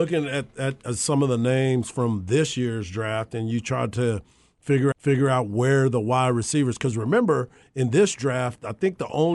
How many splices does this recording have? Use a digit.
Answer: 1